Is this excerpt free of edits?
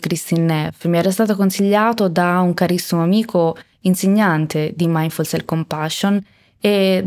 yes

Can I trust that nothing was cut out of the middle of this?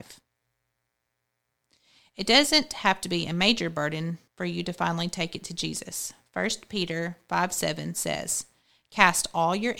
no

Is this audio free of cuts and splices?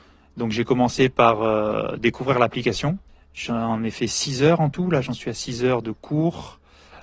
no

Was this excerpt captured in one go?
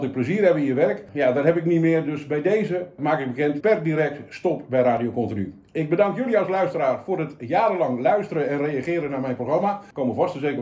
no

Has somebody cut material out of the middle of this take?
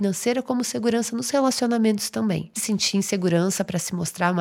yes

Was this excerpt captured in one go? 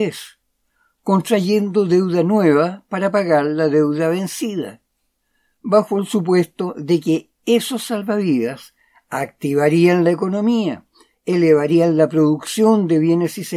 yes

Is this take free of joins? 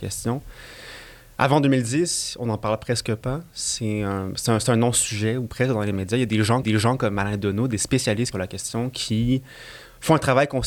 no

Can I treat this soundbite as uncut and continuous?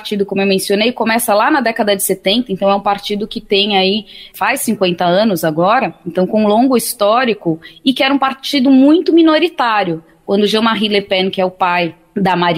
yes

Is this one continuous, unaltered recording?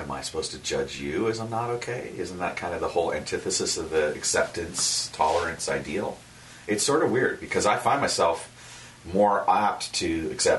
yes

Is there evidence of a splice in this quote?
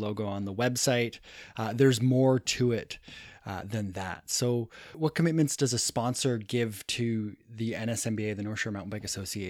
no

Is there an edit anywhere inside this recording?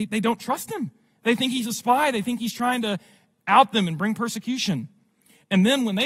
no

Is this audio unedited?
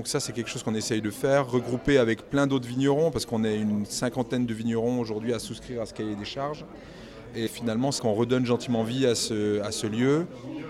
no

